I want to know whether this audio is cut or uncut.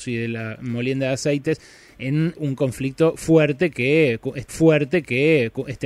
cut